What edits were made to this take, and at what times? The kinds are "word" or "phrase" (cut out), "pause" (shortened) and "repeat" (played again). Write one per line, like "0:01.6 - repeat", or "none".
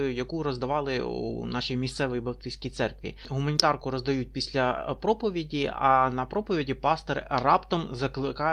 none